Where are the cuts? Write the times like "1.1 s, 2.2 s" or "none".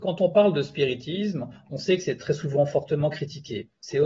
none

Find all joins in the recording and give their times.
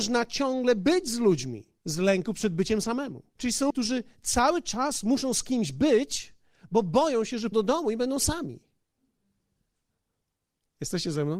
1.8 s, 3.4 s, 3.7 s, 7.5 s

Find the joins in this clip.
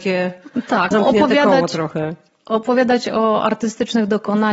0.9 s

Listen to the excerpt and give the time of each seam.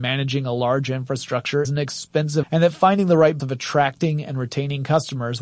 1.6 s, 2.4 s, 3.4 s

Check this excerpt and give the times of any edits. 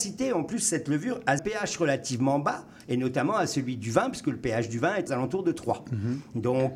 1.4 s, 5.1 s

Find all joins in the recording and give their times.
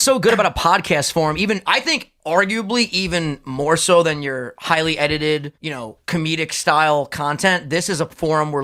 5.6 s

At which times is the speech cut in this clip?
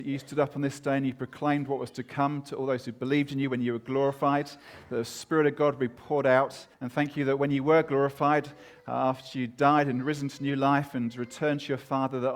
6.7 s

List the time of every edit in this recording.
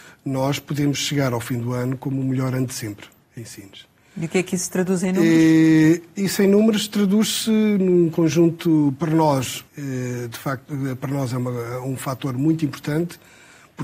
3.2 s, 9.7 s

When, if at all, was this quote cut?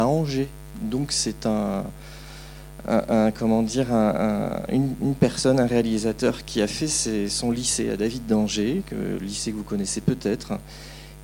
none

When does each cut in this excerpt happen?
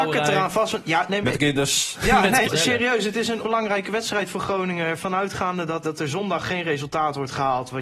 1.2 s, 2.4 s, 3.4 s, 5.8 s

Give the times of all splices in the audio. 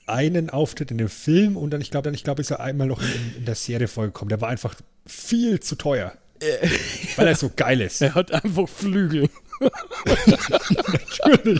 2.0 s

